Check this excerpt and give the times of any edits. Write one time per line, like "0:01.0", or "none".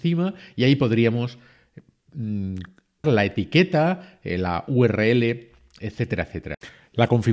0:03.0